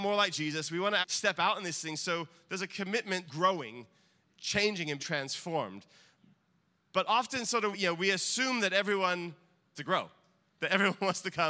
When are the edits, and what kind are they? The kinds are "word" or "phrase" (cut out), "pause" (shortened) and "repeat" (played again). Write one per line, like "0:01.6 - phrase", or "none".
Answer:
0:01.0 - word
0:03.3 - word
0:04.2 - word
0:05.0 - word
0:07.7 - word
0:09.7 - word